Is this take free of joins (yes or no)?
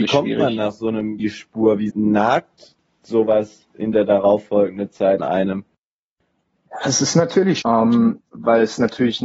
no